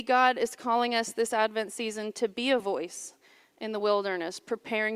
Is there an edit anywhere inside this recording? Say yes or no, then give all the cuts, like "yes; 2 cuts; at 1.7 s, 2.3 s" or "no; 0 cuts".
no; 0 cuts